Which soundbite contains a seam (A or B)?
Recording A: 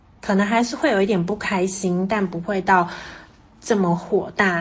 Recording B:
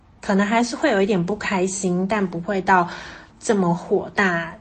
B